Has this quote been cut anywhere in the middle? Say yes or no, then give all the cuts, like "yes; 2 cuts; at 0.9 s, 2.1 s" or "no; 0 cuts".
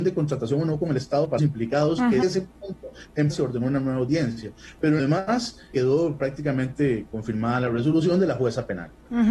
yes; 5 cuts; at 1.4 s, 2.2 s, 3.3 s, 5.0 s, 5.7 s